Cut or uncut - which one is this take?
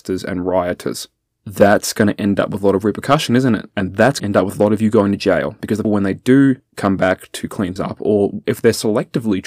cut